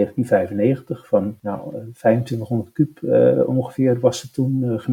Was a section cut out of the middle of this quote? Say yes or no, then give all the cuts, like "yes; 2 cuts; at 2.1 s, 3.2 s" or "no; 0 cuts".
no; 0 cuts